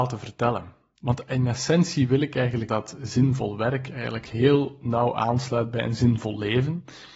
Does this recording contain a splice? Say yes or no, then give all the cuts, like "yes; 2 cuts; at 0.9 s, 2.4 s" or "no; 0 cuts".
yes; 1 cut; at 2.7 s